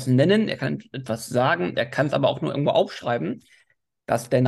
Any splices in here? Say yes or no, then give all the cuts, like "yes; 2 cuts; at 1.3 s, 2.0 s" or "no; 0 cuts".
no; 0 cuts